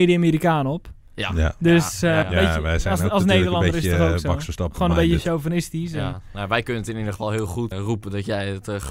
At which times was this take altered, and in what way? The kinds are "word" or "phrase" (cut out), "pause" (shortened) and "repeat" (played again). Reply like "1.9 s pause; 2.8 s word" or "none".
2.2 s word; 7.7 s word